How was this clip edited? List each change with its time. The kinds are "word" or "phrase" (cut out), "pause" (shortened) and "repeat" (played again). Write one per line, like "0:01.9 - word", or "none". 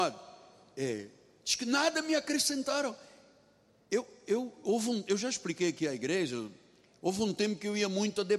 none